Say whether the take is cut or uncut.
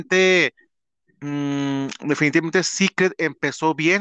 uncut